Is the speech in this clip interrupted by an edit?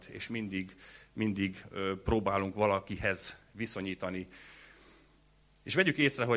no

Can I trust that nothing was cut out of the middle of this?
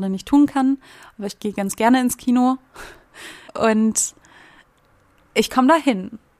yes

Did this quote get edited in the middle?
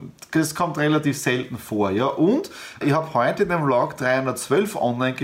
yes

